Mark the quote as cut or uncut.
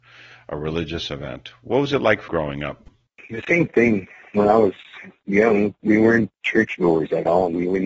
cut